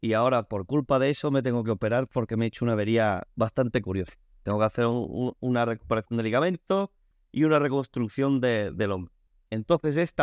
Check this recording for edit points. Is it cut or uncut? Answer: uncut